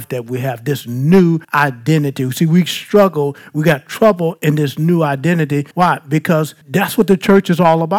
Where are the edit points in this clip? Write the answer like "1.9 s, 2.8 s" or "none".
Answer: 1.4 s, 5.7 s, 6.6 s